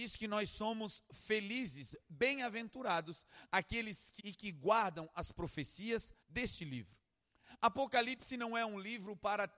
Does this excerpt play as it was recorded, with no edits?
no; 2 cuts; at 4.2 s, 6.2 s

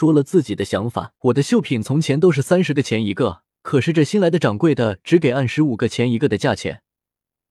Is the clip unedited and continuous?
no; 2 cuts; at 1.2 s, 3.5 s

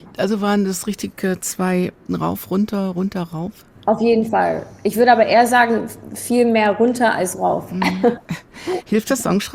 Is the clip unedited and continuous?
no; 2 cuts; at 2.1 s, 3.7 s

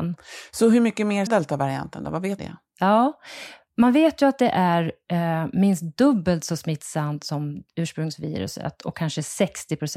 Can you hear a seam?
yes; 2 cuts; at 1.3 s, 2.4 s

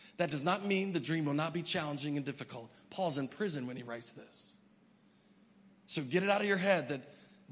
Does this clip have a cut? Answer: no; 0 cuts

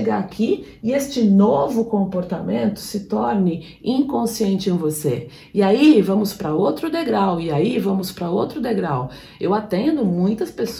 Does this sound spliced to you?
no; 0 cuts

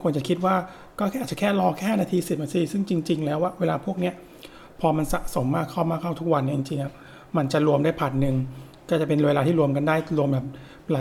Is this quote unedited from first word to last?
yes; 0 cuts

